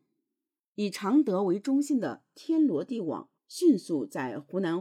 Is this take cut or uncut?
cut